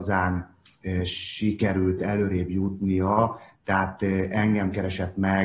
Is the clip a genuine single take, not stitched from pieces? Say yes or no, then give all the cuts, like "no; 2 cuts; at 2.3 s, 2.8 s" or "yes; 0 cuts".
yes; 0 cuts